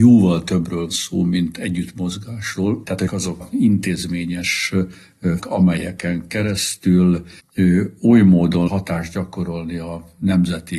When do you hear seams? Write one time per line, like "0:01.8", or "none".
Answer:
0:00.9
0:03.1
0:03.4
0:05.4
0:07.4
0:08.7